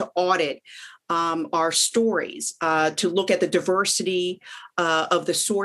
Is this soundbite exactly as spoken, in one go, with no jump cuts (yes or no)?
yes